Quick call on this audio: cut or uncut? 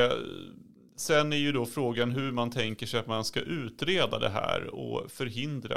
uncut